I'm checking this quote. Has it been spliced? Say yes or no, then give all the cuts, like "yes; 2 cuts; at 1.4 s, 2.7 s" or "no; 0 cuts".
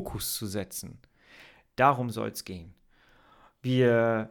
no; 0 cuts